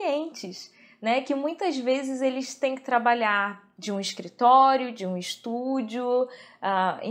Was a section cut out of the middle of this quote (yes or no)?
no